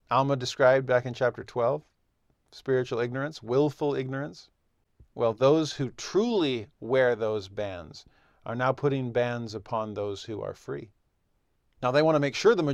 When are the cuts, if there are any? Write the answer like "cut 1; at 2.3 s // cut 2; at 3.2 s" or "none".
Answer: none